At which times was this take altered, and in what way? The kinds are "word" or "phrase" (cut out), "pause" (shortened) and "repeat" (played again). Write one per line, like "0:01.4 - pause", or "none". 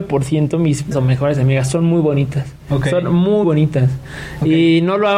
0:00.9 - word
0:03.4 - word